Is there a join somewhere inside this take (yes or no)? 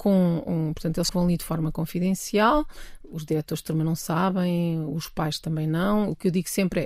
yes